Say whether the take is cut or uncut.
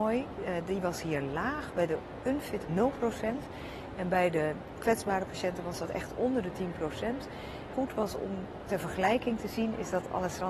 cut